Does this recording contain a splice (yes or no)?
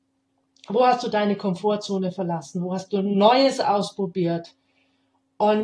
no